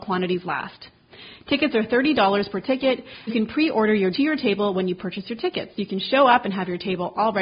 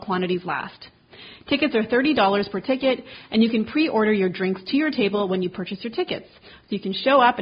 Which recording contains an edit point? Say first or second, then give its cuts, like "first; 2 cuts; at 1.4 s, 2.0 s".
first; 3 cuts; at 3.3 s, 4.1 s, 5.7 s